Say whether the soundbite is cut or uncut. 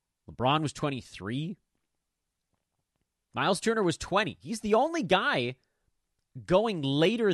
uncut